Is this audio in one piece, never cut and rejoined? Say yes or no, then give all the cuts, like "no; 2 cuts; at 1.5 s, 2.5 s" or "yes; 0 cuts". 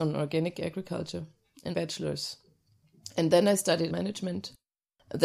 no; 2 cuts; at 1.7 s, 3.9 s